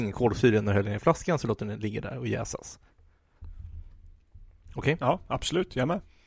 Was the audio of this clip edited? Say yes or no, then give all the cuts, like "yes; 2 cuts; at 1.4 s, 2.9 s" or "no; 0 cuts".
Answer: no; 0 cuts